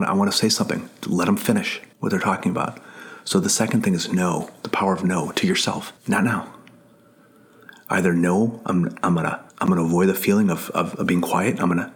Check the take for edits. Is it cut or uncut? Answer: cut